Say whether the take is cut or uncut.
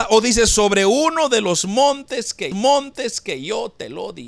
cut